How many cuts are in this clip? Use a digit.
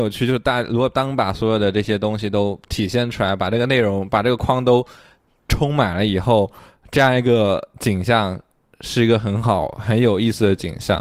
0